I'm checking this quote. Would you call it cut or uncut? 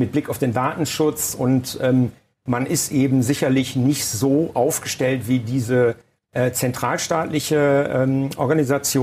uncut